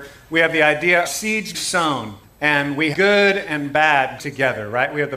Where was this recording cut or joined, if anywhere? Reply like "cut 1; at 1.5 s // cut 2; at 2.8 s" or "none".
cut 1; at 1.0 s // cut 2; at 1.5 s // cut 3; at 2.2 s // cut 4; at 2.9 s // cut 5; at 4.2 s

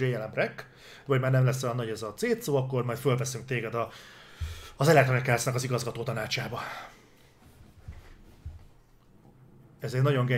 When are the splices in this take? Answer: none

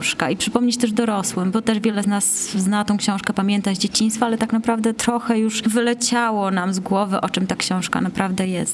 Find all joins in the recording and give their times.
none

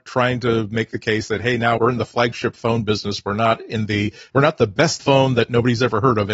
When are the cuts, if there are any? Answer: cut 1; at 1.8 s // cut 2; at 4.3 s // cut 3; at 5.0 s

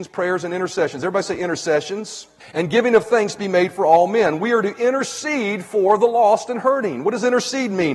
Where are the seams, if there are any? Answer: cut 1; at 2.4 s

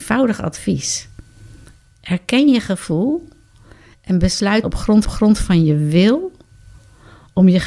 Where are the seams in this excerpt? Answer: cut 1; at 4.6 s // cut 2; at 5.0 s

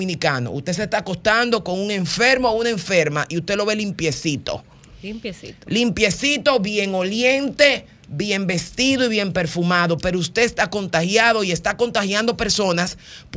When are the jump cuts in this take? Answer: none

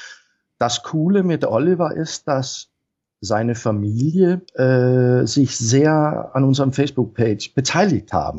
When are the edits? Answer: cut 1; at 4.5 s

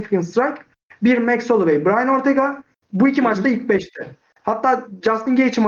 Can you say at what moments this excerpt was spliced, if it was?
none

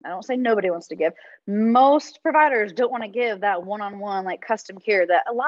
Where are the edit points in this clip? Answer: none

